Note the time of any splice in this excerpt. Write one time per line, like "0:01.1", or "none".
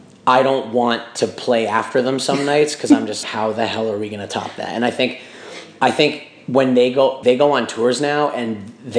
0:03.2
0:07.2